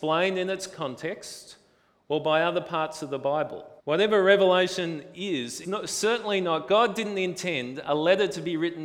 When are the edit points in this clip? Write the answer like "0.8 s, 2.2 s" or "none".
3.8 s, 5.6 s